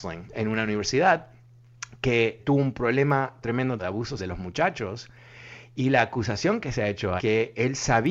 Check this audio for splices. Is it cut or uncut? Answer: cut